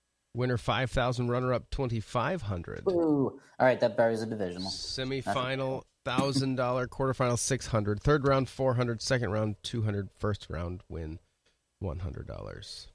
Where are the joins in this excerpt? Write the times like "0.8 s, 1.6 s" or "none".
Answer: 5.9 s